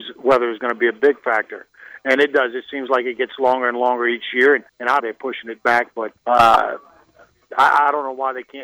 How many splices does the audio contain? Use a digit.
3